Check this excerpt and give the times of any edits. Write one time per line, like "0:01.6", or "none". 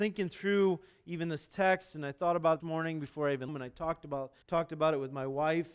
0:02.6
0:03.5
0:04.4

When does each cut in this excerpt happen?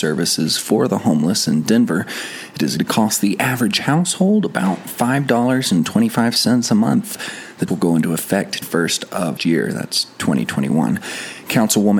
0:02.8
0:07.7
0:08.6
0:09.4

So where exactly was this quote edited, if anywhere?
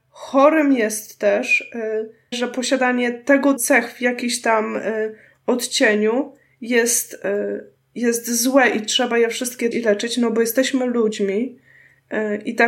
0:02.3
0:03.6
0:09.7

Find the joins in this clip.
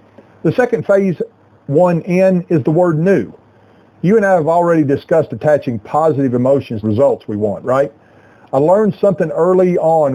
0:06.8

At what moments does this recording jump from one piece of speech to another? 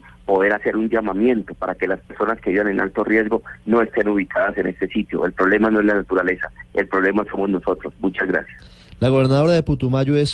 none

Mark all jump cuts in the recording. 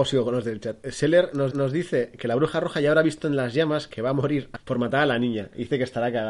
0:01.5
0:04.6

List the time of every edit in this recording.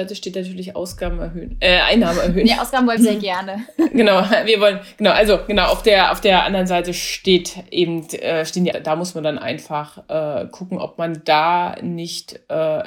0:03.0
0:08.7

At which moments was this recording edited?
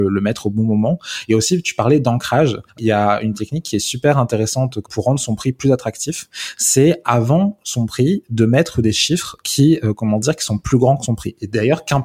0:02.7

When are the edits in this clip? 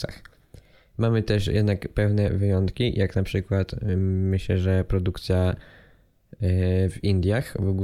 none

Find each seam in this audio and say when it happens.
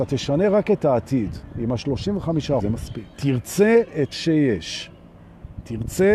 0:02.6
0:03.1
0:04.1

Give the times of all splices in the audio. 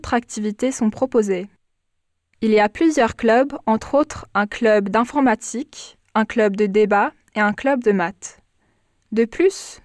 none

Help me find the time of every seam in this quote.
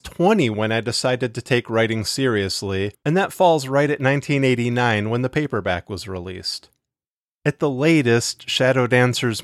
none

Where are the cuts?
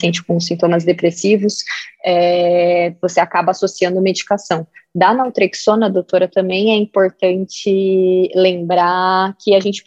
none

